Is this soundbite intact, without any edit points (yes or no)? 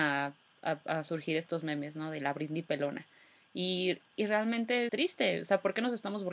no